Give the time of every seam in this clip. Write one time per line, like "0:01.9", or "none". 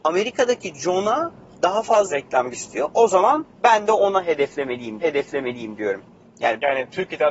0:02.1
0:02.5
0:03.5
0:05.0